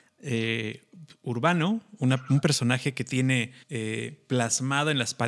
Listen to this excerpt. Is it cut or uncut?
cut